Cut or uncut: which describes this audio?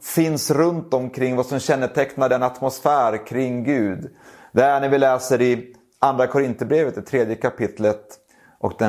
uncut